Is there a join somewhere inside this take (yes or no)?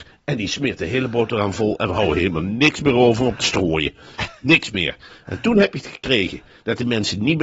no